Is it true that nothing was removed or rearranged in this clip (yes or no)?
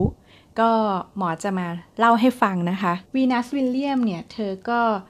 no